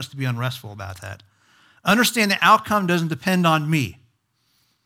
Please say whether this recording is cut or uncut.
uncut